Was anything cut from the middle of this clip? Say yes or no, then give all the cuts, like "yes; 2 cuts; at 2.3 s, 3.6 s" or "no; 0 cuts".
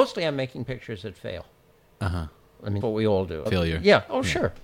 yes; 2 cuts; at 2.8 s, 3.5 s